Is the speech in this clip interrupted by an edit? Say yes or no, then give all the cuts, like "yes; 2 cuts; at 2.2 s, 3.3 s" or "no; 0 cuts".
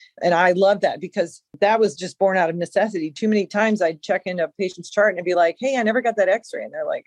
no; 0 cuts